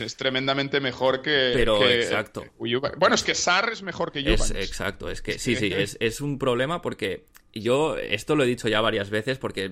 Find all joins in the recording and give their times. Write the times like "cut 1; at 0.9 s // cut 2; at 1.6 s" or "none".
none